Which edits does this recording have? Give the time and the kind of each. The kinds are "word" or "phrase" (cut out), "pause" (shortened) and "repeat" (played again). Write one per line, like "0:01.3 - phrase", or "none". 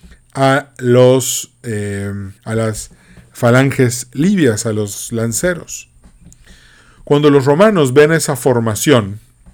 0:02.4 - pause